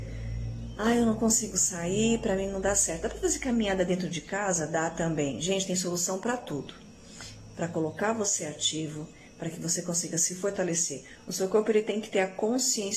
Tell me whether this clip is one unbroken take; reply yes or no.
yes